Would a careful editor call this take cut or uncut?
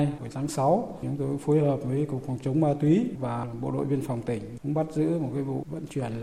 uncut